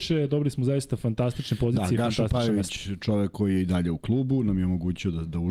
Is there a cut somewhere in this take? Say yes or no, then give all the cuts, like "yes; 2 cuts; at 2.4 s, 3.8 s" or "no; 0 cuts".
no; 0 cuts